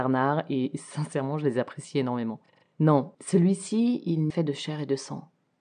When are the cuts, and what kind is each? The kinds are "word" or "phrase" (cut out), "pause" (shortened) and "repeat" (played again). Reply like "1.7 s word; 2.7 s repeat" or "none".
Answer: 3.1 s pause; 4.3 s phrase